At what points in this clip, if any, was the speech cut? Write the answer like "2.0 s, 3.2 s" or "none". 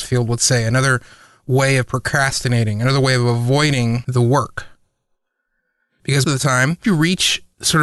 6.2 s, 6.8 s